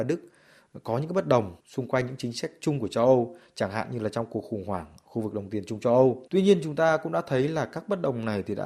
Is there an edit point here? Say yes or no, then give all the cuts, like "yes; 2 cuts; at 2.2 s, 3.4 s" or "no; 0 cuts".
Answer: yes; 2 cuts; at 1.6 s, 6.3 s